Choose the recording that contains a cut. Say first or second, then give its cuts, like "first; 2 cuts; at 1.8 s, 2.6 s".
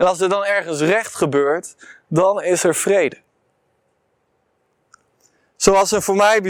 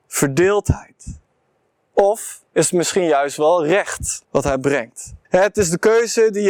second; 3 cuts; at 2.5 s, 4.2 s, 5.2 s